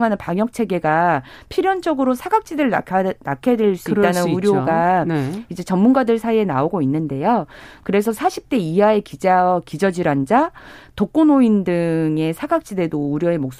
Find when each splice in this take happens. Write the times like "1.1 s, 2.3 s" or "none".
none